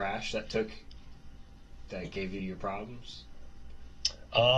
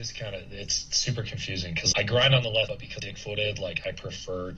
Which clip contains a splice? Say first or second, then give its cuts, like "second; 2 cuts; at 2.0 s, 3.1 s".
second; 3 cuts; at 1.9 s, 2.7 s, 3.0 s